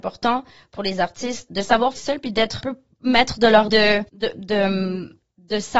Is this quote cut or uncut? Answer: cut